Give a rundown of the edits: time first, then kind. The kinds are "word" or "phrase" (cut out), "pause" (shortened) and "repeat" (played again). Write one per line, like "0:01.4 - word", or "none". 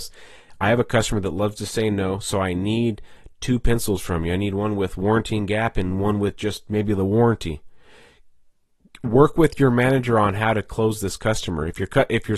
none